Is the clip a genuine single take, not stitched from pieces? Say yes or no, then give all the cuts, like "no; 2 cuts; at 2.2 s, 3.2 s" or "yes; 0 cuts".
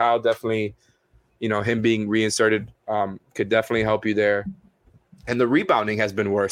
yes; 0 cuts